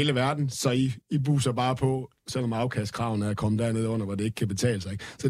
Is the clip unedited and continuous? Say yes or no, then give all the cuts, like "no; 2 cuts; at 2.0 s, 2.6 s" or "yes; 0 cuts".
no; 1 cut; at 1.0 s